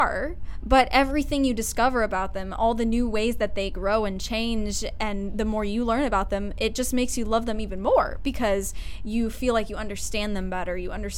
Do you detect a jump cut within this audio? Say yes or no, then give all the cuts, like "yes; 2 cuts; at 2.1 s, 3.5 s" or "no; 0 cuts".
no; 0 cuts